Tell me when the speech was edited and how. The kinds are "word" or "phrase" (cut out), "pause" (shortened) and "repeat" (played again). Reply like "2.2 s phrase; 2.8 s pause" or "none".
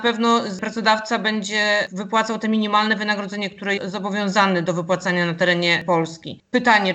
3.8 s word